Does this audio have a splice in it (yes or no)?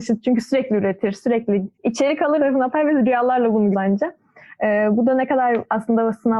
yes